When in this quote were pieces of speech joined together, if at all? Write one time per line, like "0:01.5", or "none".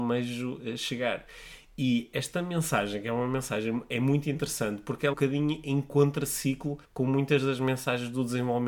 0:05.1
0:06.8